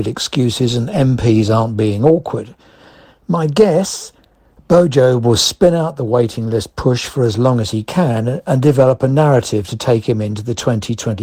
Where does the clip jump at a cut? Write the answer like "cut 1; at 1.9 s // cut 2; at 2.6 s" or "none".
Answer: none